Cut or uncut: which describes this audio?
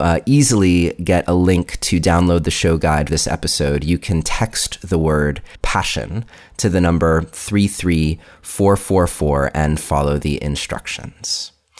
cut